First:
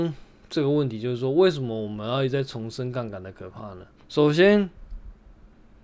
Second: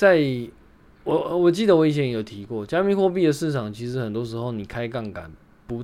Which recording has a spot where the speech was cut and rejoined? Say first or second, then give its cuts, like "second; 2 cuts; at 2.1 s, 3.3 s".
first; 1 cut; at 4.0 s